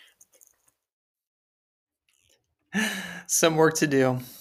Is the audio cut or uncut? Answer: uncut